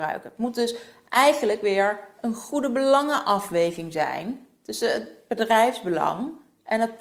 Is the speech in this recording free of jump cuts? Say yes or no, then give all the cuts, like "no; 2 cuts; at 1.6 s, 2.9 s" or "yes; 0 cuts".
yes; 0 cuts